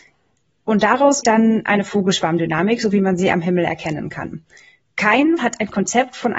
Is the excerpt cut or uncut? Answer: cut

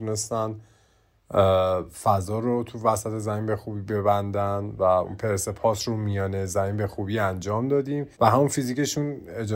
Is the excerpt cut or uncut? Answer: cut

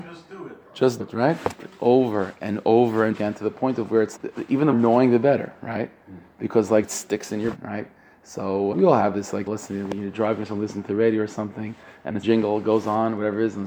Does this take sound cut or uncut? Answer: cut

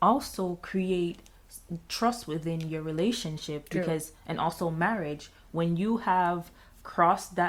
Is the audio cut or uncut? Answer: uncut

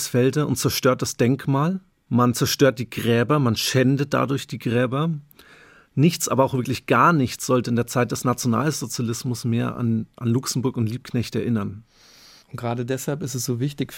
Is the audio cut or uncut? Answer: uncut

